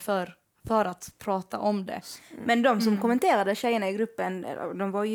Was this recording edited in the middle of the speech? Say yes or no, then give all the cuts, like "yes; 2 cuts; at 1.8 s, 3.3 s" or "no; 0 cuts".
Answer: no; 0 cuts